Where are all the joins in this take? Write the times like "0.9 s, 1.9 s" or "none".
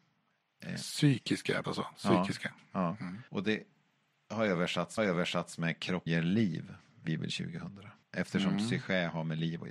1.6 s, 3.3 s, 5.0 s, 6.1 s, 7.1 s, 8.0 s